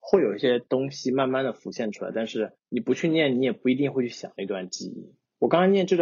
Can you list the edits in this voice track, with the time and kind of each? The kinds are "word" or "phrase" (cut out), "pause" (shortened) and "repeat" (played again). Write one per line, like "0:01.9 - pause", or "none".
0:02.6 - pause

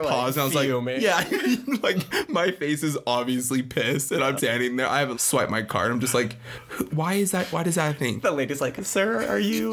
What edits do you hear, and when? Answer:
0:04.4 - word
0:05.1 - word
0:06.9 - word
0:08.8 - word

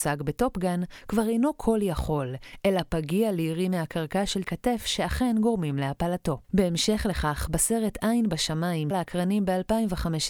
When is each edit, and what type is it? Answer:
0:04.4 - word
0:06.4 - pause
0:08.9 - word

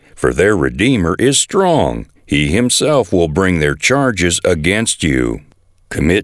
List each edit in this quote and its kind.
0:02.2 - pause

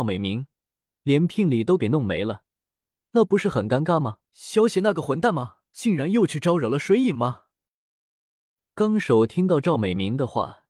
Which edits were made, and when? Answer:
0:04.3 - pause
0:05.7 - pause

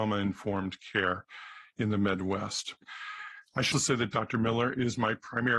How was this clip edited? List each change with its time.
0:03.7 - word

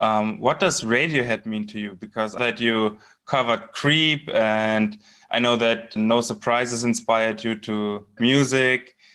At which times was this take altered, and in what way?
0:02.4 - word
0:06.0 - word
0:08.2 - word

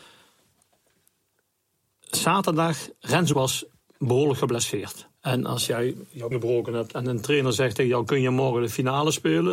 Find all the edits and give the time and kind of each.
0:03.3 - word
0:05.2 - pause
0:06.3 - word

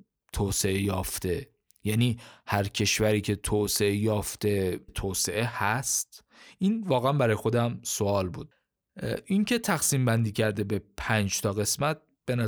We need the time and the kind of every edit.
0:04.9 - phrase

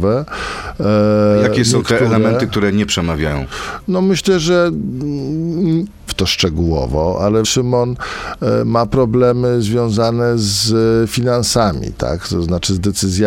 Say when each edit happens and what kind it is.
0:06.1 - phrase
0:07.4 - phrase

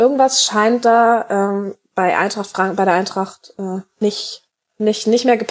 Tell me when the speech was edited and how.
none

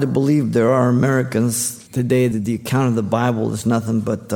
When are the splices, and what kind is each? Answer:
0:01.9 - pause
0:02.3 - word

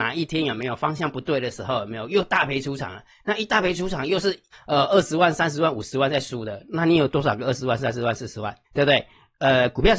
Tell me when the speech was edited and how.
0:04.5 - pause
0:08.6 - pause

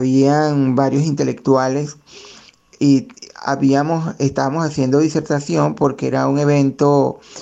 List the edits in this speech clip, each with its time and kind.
0:02.8 - word

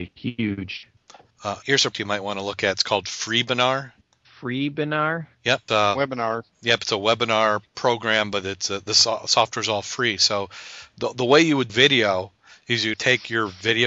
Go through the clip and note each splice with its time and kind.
0:01.6 - word
0:01.9 - word
0:05.7 - word
0:10.9 - word
0:11.7 - word
0:12.9 - word

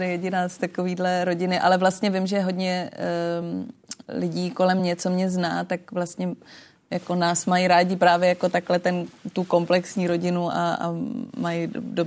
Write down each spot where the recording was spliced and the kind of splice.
none

